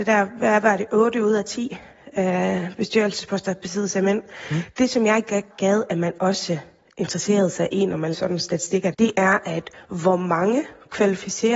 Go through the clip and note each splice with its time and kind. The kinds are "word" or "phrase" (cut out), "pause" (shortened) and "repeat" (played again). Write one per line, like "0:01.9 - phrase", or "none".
0:05.5 - word
0:08.1 - word
0:08.9 - word

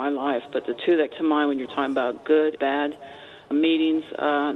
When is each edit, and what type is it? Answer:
0:01.1 - word
0:02.6 - word
0:03.5 - word

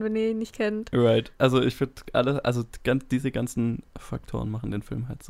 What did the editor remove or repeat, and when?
0:03.9 - pause

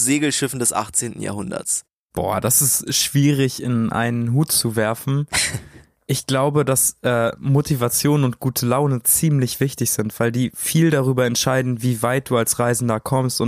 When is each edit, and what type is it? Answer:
none

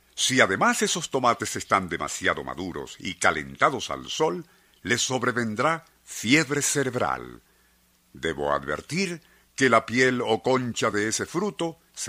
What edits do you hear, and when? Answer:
none

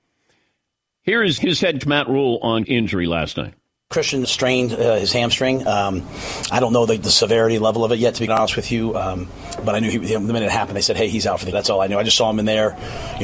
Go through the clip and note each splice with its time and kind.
0:01.4 - word
0:01.8 - word
0:02.6 - word
0:04.2 - word
0:08.3 - word
0:11.5 - phrase

